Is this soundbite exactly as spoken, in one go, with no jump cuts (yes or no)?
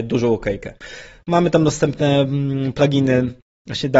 yes